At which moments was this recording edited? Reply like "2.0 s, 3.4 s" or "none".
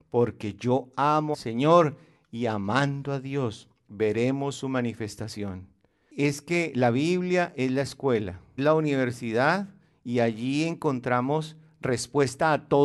1.3 s, 8.6 s